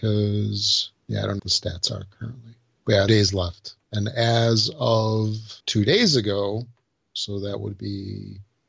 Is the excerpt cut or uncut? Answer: cut